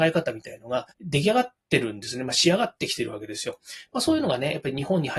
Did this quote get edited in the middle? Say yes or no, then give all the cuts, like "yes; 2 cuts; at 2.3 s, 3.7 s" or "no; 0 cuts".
yes; 1 cut; at 0.9 s